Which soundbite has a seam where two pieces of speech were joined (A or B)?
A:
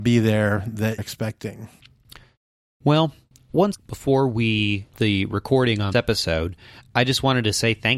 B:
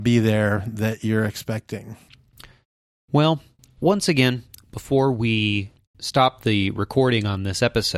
A